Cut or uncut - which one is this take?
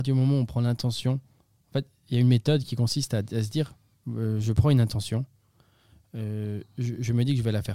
uncut